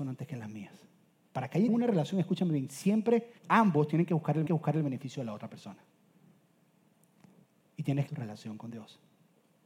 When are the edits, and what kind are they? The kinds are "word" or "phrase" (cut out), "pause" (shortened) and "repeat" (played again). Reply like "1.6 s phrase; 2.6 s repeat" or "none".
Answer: 1.7 s word; 3.4 s pause; 4.5 s repeat; 8.1 s phrase